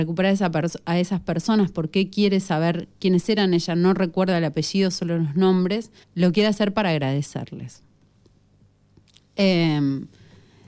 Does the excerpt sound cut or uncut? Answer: cut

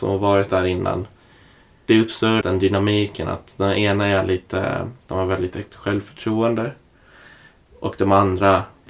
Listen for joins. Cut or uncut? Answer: cut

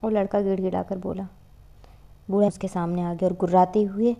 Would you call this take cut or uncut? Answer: cut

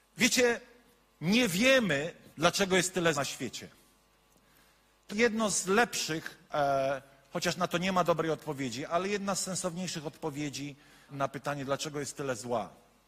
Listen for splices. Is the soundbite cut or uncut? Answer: cut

